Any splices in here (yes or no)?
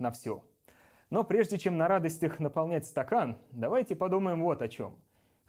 no